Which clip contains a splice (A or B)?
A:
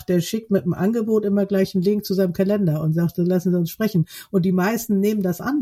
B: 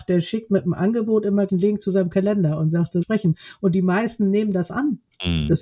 B